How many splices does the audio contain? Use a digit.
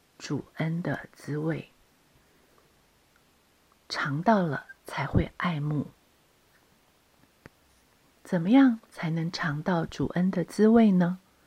1